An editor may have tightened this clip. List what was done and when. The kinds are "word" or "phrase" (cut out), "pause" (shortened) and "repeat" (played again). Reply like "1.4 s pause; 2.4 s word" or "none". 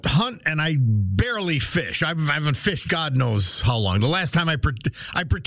2.9 s word